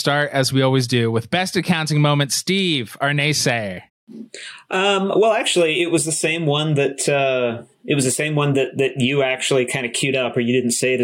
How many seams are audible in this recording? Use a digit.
2